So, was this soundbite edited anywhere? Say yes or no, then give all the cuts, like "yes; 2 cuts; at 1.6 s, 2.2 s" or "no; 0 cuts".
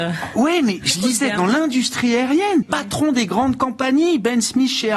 yes; 1 cut; at 2.6 s